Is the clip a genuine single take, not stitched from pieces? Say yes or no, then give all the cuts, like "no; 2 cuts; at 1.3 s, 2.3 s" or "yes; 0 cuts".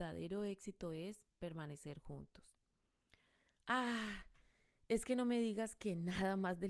yes; 0 cuts